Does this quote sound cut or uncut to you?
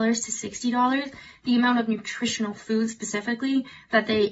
uncut